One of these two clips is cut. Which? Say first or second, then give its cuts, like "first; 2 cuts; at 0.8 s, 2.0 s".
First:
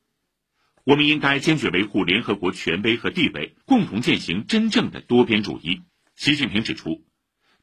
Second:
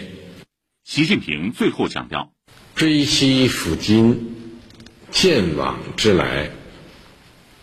first; 2 cuts; at 3.6 s, 5.9 s